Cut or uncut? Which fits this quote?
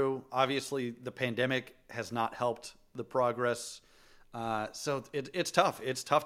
uncut